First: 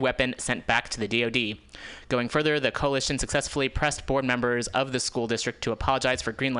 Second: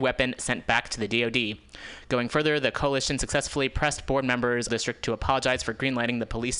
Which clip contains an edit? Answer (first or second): second